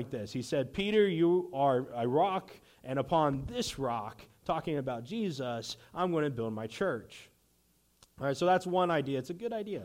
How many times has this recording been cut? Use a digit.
0